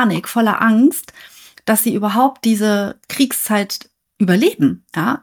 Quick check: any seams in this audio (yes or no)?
no